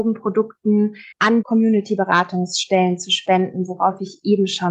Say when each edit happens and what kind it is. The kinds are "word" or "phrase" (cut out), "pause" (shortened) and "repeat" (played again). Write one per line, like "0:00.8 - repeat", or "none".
0:01.1 - pause